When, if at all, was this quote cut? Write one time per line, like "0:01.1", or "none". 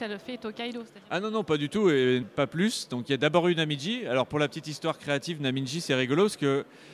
0:02.2